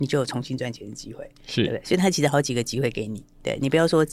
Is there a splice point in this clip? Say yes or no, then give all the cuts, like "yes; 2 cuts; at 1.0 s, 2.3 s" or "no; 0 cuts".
no; 0 cuts